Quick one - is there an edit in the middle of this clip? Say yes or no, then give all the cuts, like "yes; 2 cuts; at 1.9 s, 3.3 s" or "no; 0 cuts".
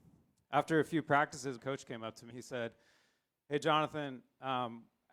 yes; 2 cuts; at 1.6 s, 2.3 s